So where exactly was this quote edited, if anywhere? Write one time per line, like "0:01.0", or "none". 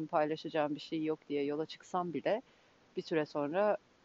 none